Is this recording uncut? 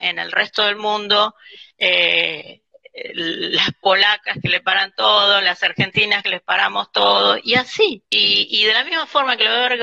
no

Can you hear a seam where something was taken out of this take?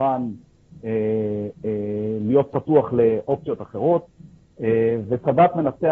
no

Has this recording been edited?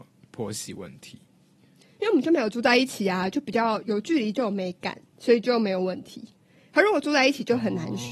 yes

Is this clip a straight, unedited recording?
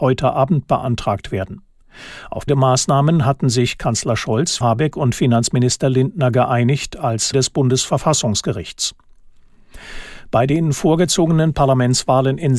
no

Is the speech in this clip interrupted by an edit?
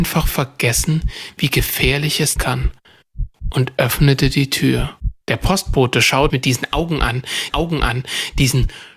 yes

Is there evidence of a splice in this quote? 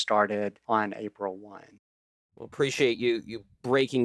no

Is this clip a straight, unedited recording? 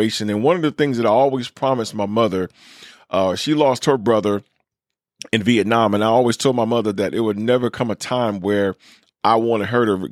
yes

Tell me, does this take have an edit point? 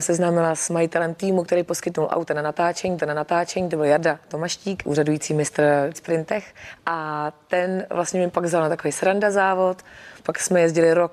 yes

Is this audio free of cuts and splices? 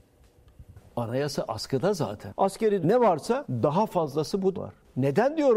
no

